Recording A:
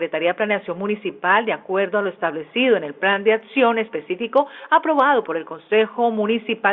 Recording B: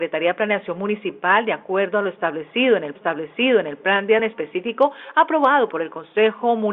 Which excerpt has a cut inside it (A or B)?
B